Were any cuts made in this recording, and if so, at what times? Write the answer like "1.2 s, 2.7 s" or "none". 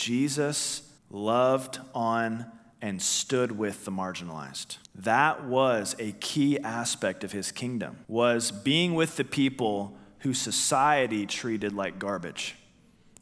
1.0 s, 4.8 s, 8.0 s

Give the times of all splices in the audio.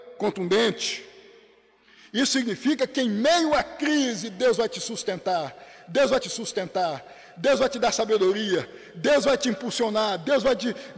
6.2 s

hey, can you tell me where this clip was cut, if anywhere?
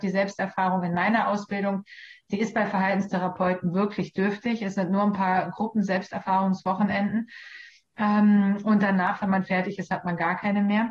none

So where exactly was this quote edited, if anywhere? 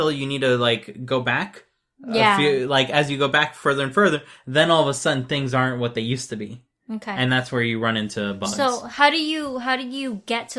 none

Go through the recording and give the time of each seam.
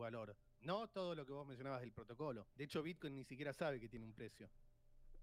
2.5 s

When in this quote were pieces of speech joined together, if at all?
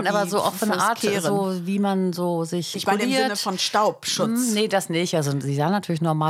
2.7 s

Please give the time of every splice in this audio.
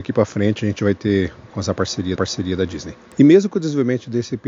1.5 s, 2.2 s

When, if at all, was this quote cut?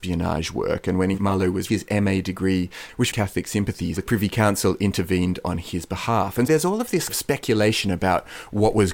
1.2 s, 1.7 s, 3.1 s, 4.0 s, 6.5 s, 7.1 s

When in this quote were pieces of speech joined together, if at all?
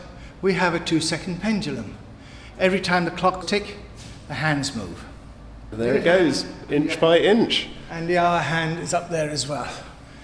3.4 s

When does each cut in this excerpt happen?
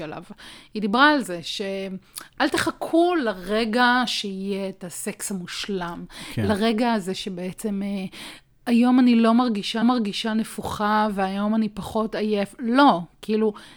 9.8 s

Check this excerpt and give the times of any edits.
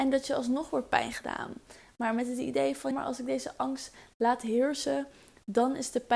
2.9 s

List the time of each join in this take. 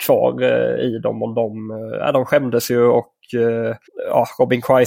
3.9 s

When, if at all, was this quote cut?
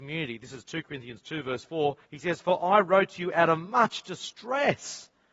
2.0 s

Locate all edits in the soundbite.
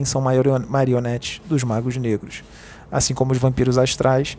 none

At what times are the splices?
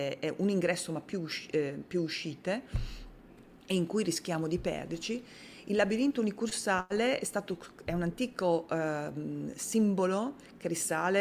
none

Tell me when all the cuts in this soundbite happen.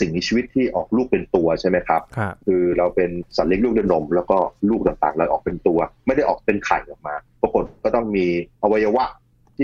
2.4 s, 7.3 s, 8.5 s

